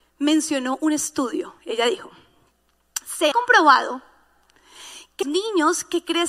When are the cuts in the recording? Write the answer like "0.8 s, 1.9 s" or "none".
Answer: 1.6 s, 3.3 s, 5.2 s